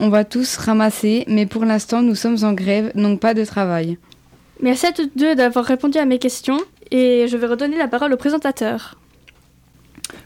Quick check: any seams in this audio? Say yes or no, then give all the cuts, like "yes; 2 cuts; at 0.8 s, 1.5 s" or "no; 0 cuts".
yes; 2 cuts; at 4.2 s, 6.7 s